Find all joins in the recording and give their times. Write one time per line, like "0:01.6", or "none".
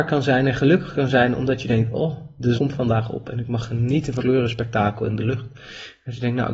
0:02.6
0:04.2